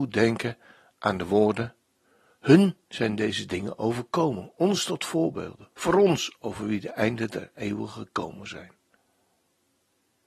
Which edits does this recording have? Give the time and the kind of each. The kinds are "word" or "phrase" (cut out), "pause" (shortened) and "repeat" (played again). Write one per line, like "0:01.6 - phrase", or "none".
0:05.7 - pause